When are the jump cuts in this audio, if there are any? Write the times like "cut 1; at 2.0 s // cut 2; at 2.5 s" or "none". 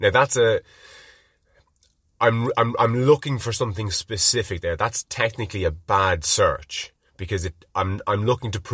none

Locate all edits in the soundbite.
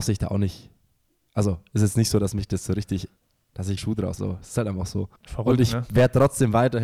cut 1; at 3.2 s // cut 2; at 3.8 s // cut 3; at 4.2 s // cut 4; at 5.2 s

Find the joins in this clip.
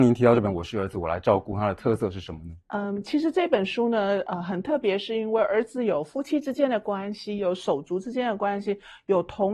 cut 1; at 2.6 s

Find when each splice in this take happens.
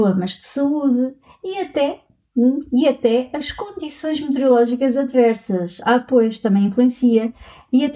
none

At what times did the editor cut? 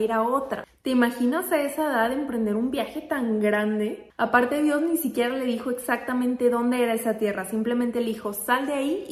none

